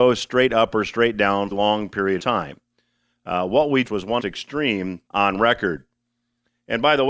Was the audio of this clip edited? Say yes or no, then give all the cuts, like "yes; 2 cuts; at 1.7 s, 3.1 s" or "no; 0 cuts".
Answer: yes; 5 cuts; at 1.5 s, 2.2 s, 3.8 s, 4.2 s, 5.1 s